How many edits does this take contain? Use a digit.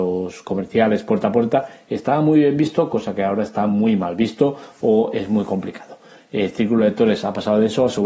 0